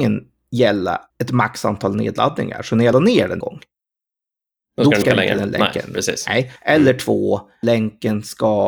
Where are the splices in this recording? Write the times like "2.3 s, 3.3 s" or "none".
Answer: 1.1 s, 2.9 s, 3.4 s, 5.0 s, 6.6 s, 7.6 s